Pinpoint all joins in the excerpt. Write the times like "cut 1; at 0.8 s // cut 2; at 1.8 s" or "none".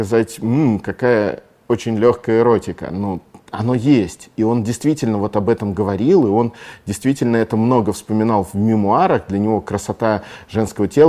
none